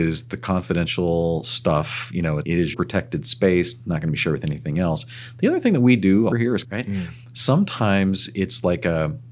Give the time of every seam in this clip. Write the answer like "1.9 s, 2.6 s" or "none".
2.4 s, 2.7 s, 6.3 s, 6.6 s